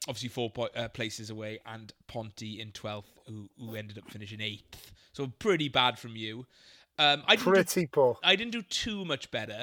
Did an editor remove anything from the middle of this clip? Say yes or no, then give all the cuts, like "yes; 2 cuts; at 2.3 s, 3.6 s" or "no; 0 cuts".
no; 0 cuts